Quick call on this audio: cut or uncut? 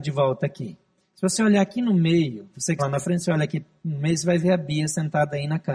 cut